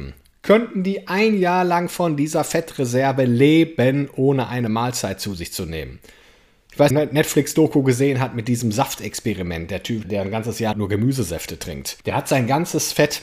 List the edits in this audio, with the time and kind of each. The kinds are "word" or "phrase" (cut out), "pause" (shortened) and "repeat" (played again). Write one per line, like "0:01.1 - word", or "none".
0:06.9 - phrase
0:10.0 - word
0:10.7 - word
0:12.0 - pause